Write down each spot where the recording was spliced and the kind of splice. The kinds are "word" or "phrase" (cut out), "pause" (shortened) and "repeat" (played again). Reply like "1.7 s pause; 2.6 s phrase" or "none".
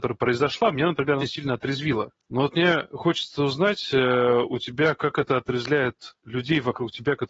1.2 s word; 2.2 s pause; 6.2 s pause